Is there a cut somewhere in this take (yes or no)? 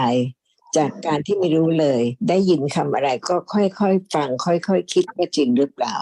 no